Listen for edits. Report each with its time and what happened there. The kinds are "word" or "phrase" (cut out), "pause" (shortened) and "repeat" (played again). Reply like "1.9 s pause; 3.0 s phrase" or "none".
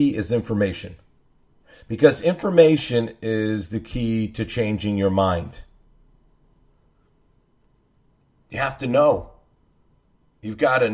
none